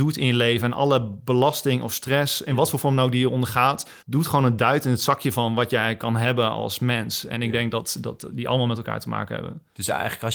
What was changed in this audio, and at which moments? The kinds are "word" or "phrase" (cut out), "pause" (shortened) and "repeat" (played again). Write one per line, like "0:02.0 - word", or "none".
0:04.0 - pause